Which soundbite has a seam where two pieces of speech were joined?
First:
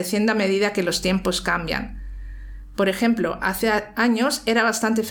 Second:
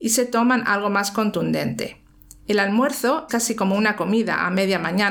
second; 1 cut; at 3.3 s

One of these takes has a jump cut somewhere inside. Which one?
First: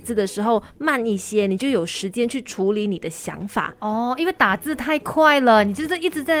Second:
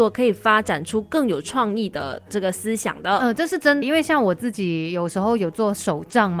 second; 1 cut; at 3.8 s

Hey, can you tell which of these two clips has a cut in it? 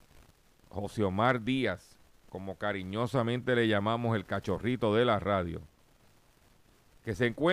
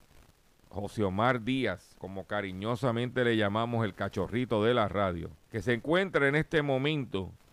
second; 2 cuts; at 2.0 s, 5.4 s

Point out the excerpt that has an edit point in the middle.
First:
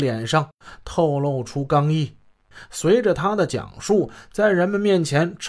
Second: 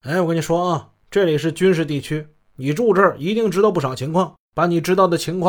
second; 1 cut; at 4.4 s

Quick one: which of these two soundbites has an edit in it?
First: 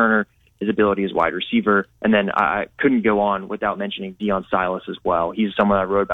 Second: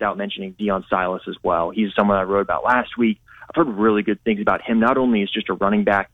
first; 1 cut; at 1.9 s

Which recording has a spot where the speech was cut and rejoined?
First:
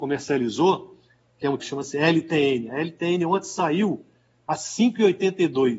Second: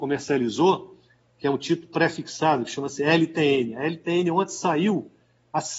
first; 1 cut; at 1.6 s

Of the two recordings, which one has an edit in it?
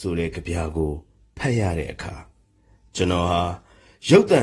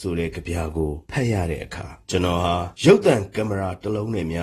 second; 3 cuts; at 1.0 s, 2.0 s, 2.7 s

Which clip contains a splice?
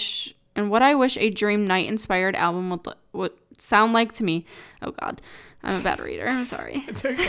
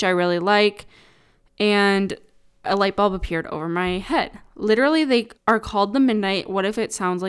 second; 2 cuts; at 2.6 s, 5.4 s

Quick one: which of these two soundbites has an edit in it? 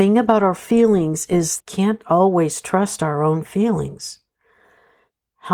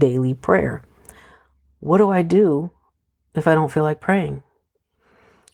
first; 1 cut; at 1.6 s

